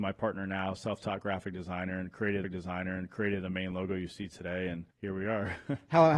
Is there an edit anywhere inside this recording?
yes; 2 cuts; at 2.4 s, 4.9 s

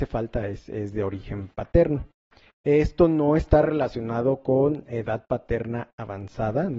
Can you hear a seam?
no; 0 cuts

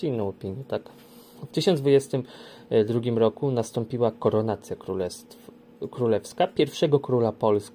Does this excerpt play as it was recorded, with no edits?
yes; 0 cuts

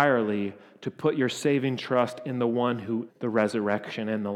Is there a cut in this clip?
yes; 1 cut; at 3.1 s

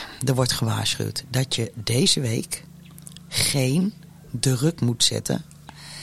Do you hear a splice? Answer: no; 0 cuts

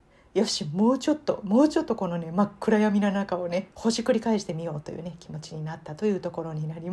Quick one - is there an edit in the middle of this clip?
yes; 1 cut; at 3.7 s

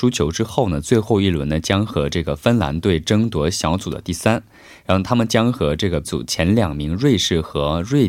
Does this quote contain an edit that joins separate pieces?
yes; 1 cut; at 6.0 s

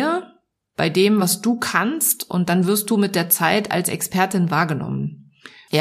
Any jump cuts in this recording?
no; 0 cuts

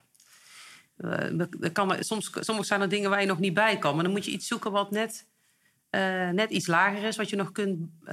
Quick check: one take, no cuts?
yes; 0 cuts

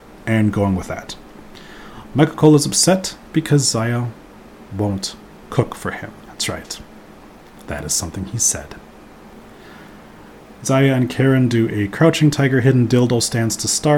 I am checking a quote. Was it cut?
yes; 1 cut; at 6.2 s

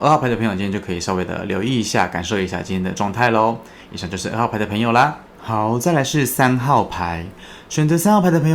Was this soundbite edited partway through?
yes; 1 cut; at 5.3 s

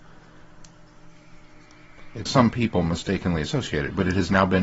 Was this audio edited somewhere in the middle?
yes; 1 cut; at 2.3 s

